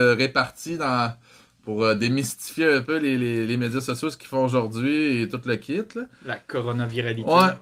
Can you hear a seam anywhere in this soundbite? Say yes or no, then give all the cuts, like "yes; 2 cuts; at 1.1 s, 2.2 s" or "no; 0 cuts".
no; 0 cuts